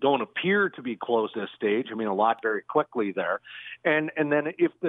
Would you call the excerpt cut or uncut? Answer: cut